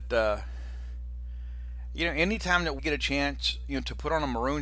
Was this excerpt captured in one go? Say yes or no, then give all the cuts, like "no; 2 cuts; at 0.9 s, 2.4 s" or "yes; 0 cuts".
no; 1 cut; at 2.8 s